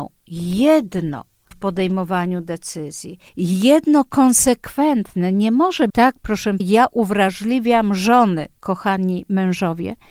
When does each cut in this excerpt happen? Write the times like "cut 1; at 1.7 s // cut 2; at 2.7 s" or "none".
cut 1; at 1.5 s // cut 2; at 3.3 s // cut 3; at 5.9 s // cut 4; at 6.6 s // cut 5; at 8.6 s

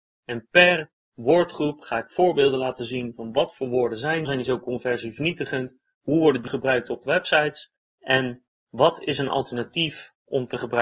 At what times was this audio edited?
cut 1; at 4.2 s // cut 2; at 6.5 s // cut 3; at 7.8 s

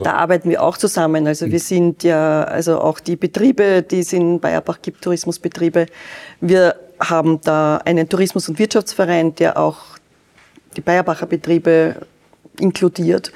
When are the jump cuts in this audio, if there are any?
cut 1; at 3.0 s

